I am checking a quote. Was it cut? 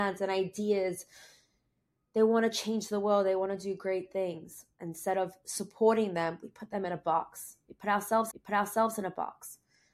yes; 1 cut; at 8.3 s

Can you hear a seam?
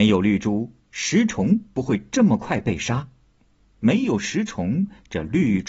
no; 0 cuts

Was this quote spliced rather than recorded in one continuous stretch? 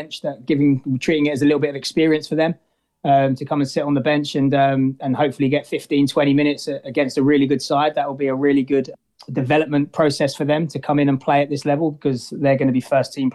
no; 0 cuts

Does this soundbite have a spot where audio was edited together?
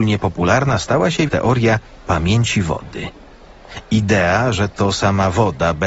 yes; 1 cut; at 1.3 s

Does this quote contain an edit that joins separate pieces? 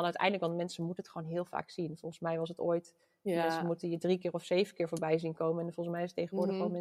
no; 0 cuts

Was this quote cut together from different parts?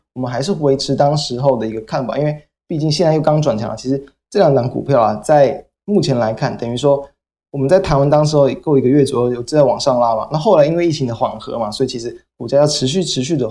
no; 0 cuts

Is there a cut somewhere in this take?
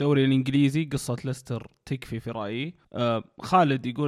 yes; 1 cut; at 2.8 s

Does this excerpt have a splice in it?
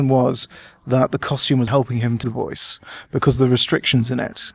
yes; 2 cuts; at 1.7 s, 2.2 s

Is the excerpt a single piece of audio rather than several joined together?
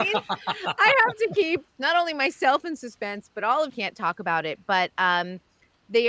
no; 2 cuts; at 1.7 s, 3.7 s

